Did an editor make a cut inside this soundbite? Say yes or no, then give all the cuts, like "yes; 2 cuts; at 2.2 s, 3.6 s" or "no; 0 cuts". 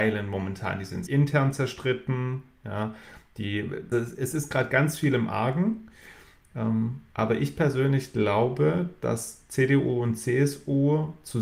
yes; 2 cuts; at 1.1 s, 3.9 s